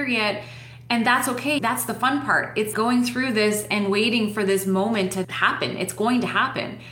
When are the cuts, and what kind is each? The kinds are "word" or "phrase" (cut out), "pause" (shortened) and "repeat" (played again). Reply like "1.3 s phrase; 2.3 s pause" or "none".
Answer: 1.6 s word; 2.7 s word; 5.2 s word

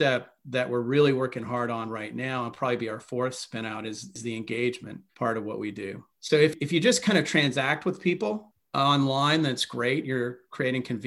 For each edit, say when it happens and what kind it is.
5.1 s pause; 6.1 s pause

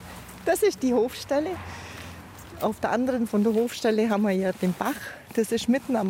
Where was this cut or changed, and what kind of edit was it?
3.3 s word

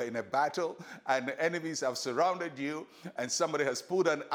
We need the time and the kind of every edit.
none

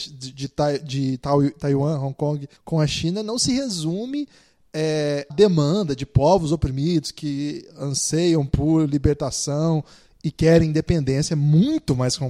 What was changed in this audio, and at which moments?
2.6 s pause; 5.3 s word

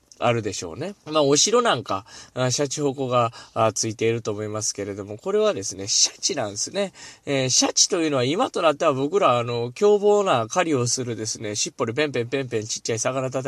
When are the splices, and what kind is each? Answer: 1.0 s pause

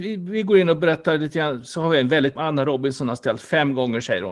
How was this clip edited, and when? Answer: 2.4 s phrase

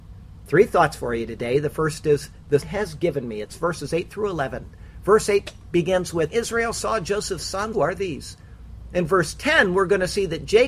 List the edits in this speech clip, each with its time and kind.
2.6 s phrase; 6.3 s word; 7.7 s phrase

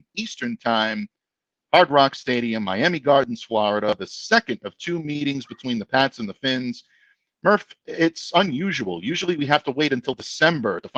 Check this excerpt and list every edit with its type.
none

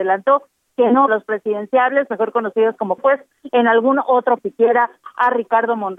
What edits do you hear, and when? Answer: 1.1 s phrase; 3.0 s phrase; 4.4 s phrase

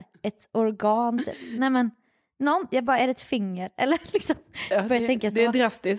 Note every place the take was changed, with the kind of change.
none

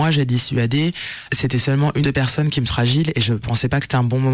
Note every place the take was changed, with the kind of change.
1.3 s word; 2.0 s word; 2.7 s word

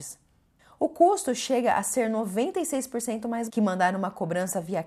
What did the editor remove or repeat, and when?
3.5 s word

